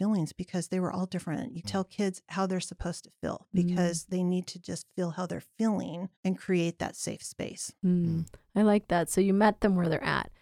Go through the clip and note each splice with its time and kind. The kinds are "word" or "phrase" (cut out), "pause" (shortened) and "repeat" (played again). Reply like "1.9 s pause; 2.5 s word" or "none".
1.6 s word; 6.2 s pause; 7.8 s pause